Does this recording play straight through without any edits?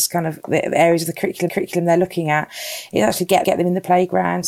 no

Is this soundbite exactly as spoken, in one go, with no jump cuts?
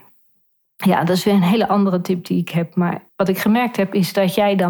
no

